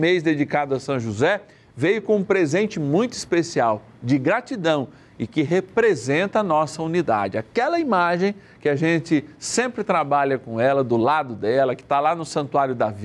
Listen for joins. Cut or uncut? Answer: uncut